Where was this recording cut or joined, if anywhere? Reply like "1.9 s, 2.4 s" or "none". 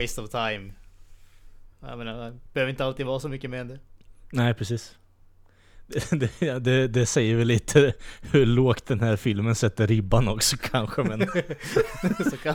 1.7 s